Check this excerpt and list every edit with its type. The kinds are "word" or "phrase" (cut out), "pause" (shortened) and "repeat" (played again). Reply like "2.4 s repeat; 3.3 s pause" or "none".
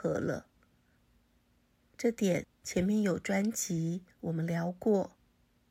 2.5 s pause; 4.1 s pause

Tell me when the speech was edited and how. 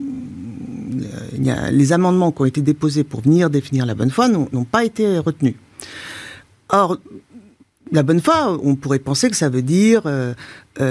none

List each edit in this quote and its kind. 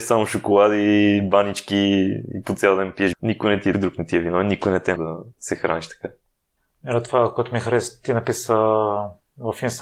3.1 s word; 3.7 s word; 5.0 s word; 5.3 s pause

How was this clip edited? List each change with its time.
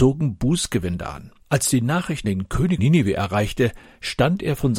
1.4 s pause; 2.2 s word; 2.8 s word

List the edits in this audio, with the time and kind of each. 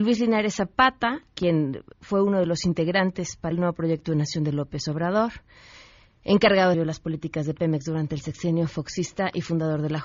1.3 s word; 1.9 s pause; 3.5 s word; 6.7 s word

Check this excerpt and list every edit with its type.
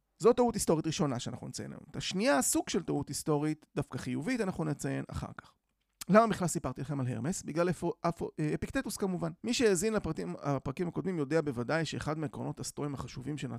9.4 s pause

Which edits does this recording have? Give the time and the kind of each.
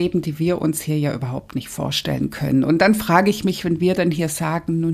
none

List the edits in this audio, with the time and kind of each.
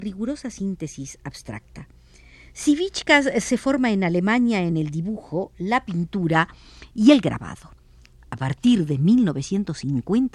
none

